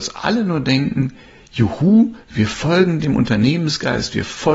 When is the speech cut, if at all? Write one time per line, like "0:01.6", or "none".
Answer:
none